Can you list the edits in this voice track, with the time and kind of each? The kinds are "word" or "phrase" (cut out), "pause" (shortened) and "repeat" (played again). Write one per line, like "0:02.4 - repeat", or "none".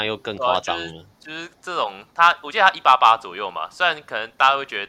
0:01.1 - pause